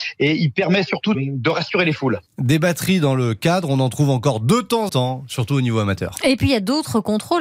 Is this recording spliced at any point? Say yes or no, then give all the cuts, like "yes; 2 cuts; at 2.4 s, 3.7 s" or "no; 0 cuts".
yes; 2 cuts; at 1.1 s, 4.9 s